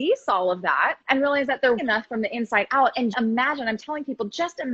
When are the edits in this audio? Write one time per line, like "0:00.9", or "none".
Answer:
0:01.0
0:01.8
0:03.1